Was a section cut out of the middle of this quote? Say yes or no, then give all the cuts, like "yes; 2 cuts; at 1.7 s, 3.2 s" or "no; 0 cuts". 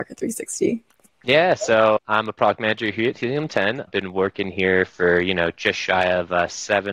yes; 2 cuts; at 2.0 s, 3.9 s